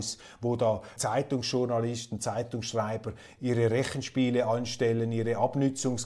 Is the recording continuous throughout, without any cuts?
no; 2 cuts; at 1.0 s, 3.4 s

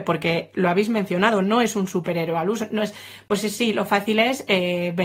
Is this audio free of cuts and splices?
yes; 0 cuts

